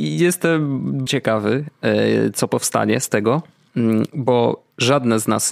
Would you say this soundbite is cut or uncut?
cut